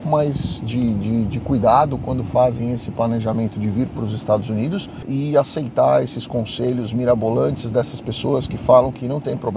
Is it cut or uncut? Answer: uncut